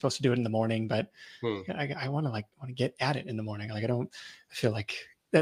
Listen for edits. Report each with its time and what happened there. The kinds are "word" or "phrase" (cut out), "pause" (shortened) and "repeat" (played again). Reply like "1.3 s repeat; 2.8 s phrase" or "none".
2.5 s pause